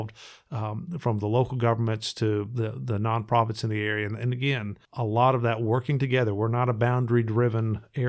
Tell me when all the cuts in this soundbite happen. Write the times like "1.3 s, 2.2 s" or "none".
4.8 s